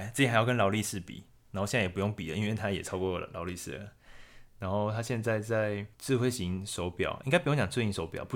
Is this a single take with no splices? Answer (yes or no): no